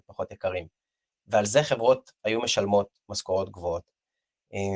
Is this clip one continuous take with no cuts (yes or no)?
yes